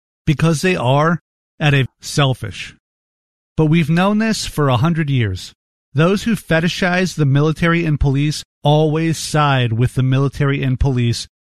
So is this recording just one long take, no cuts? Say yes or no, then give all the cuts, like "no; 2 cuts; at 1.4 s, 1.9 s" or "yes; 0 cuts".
no; 2 cuts; at 1.9 s, 8.5 s